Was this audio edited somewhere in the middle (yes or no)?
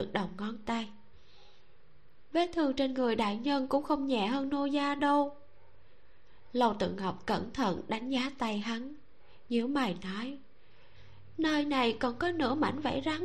no